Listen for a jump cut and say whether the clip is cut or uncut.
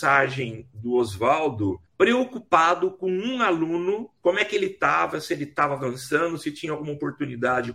cut